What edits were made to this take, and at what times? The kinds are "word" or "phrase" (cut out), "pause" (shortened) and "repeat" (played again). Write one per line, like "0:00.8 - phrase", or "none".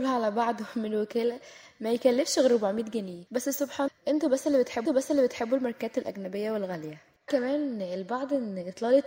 0:03.3 - pause
0:03.9 - word
0:04.9 - repeat
0:07.3 - word